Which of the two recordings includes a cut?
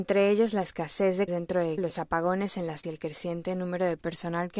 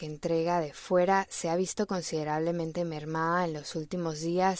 first; 3 cuts; at 1.3 s, 1.8 s, 2.8 s

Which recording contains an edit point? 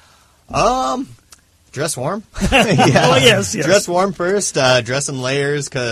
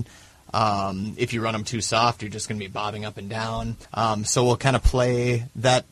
second; 1 cut; at 3.8 s

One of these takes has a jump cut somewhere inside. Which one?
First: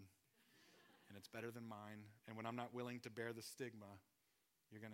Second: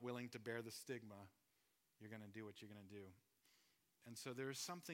first; 1 cut; at 2.2 s

